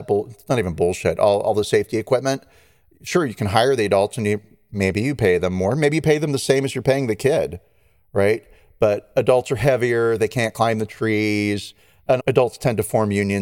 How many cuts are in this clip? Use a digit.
1